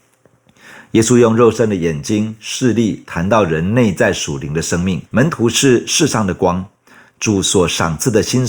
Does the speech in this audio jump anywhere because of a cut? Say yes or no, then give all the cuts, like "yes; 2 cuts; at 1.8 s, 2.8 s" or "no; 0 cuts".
yes; 1 cut; at 5.1 s